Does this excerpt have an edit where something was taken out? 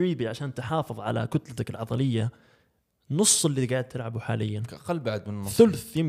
no; 0 cuts

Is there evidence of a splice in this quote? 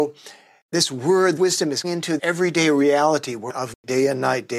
yes; 4 cuts; at 1.4 s, 1.8 s, 2.2 s, 3.5 s

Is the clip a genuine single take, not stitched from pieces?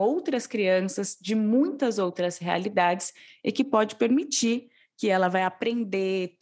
yes; 0 cuts

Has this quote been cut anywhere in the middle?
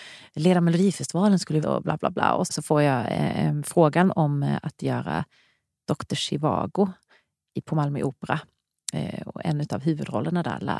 yes; 2 cuts; at 1.6 s, 2.5 s

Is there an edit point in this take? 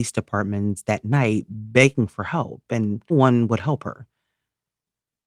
yes; 1 cut; at 3.1 s

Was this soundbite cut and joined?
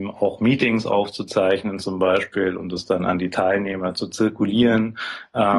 no; 0 cuts

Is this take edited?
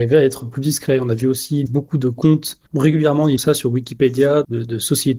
yes; 3 cuts; at 1.7 s, 2.7 s, 3.4 s

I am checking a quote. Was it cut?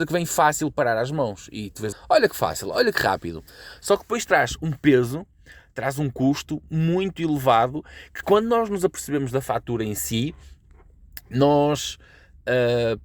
yes; 1 cut; at 1.9 s

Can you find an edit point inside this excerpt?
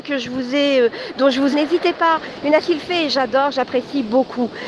yes; 2 cuts; at 1.5 s, 2.6 s

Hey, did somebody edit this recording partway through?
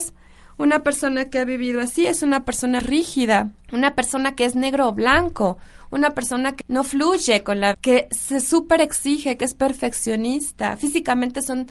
yes; 4 cuts; at 2.8 s, 3.6 s, 6.6 s, 7.7 s

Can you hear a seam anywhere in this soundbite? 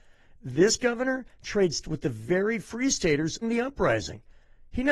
yes; 2 cuts; at 1.8 s, 3.4 s

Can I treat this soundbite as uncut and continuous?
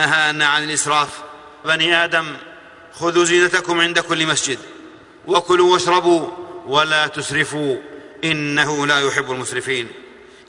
no; 1 cut; at 1.6 s

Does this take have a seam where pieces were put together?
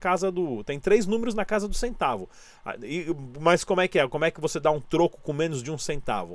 no; 0 cuts

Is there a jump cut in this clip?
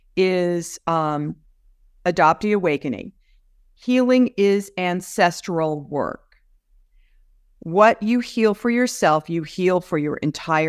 no; 0 cuts

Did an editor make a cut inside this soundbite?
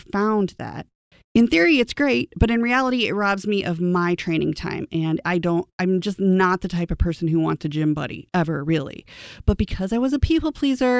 no; 0 cuts

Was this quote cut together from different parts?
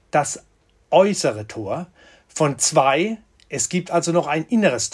no; 0 cuts

